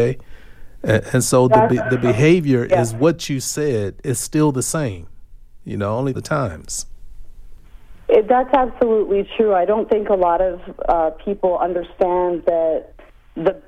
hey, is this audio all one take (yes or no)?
no